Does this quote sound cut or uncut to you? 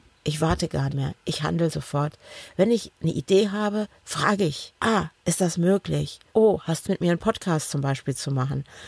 cut